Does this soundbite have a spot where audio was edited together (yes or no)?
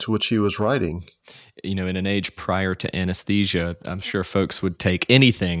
no